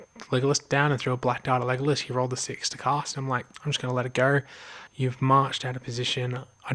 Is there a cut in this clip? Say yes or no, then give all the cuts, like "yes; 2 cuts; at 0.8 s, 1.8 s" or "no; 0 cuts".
yes; 2 cuts; at 3.5 s, 4.9 s